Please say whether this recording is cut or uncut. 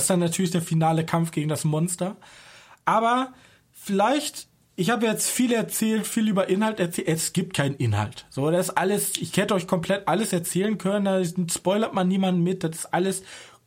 uncut